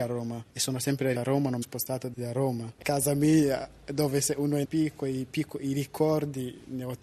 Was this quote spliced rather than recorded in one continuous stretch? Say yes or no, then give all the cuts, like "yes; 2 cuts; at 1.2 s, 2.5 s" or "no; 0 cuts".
yes; 4 cuts; at 1.1 s, 1.6 s, 2.8 s, 4.6 s